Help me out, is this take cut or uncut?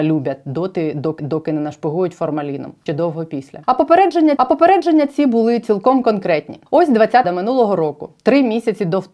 cut